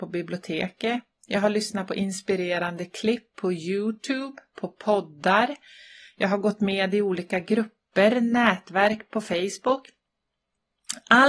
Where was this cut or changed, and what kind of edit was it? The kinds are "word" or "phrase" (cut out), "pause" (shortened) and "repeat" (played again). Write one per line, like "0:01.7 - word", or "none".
none